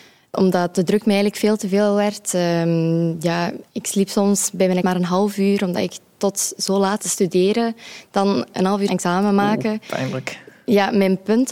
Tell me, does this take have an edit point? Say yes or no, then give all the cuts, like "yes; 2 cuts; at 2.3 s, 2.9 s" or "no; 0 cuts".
yes; 4 cuts; at 3.7 s, 4.8 s, 7.0 s, 8.9 s